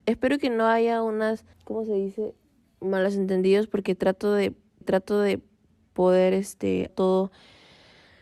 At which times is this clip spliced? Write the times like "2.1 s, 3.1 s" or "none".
1.5 s, 4.8 s, 6.9 s